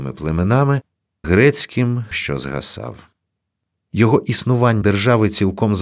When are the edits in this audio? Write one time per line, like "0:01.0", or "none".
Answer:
0:01.2
0:02.1
0:04.8